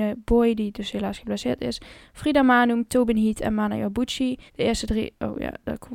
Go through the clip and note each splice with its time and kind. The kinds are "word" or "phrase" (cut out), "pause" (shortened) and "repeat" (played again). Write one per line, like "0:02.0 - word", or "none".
0:04.5 - pause